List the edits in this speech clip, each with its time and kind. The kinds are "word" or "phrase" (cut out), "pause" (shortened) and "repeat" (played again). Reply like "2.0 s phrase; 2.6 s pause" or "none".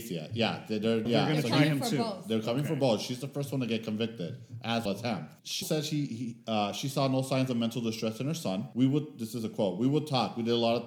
1.1 s word; 4.9 s word; 5.6 s word